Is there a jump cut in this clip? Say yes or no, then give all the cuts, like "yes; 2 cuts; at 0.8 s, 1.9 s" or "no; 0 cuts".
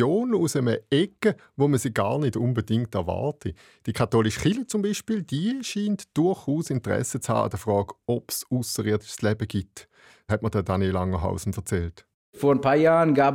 no; 0 cuts